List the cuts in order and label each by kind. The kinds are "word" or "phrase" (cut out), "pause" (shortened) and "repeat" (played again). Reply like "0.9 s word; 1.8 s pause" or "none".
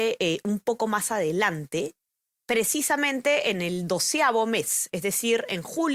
none